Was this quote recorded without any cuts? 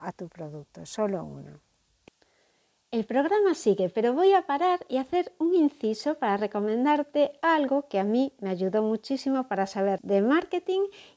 no; 1 cut; at 10.0 s

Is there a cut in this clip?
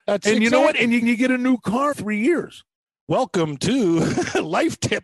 yes; 3 cuts; at 1.0 s, 1.9 s, 2.8 s

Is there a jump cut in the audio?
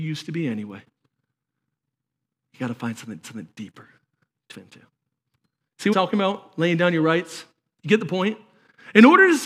yes; 3 cuts; at 3.2 s, 4.5 s, 5.9 s

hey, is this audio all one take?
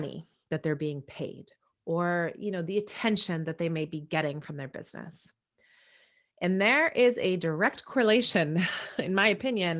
yes; 0 cuts

